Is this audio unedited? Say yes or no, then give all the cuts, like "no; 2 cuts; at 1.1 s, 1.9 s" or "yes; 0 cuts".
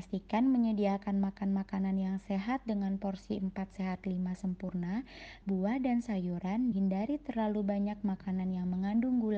no; 2 cuts; at 5.4 s, 6.7 s